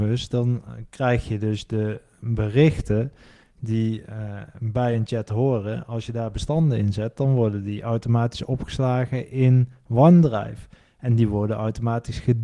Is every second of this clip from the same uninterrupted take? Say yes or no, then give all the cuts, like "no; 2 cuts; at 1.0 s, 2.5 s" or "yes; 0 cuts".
yes; 0 cuts